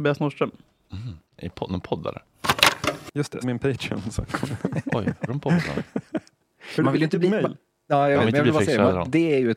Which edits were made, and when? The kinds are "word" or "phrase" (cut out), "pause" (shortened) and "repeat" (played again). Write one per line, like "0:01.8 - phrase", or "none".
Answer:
0:01.3 - pause
0:03.4 - word
0:05.3 - word
0:06.8 - word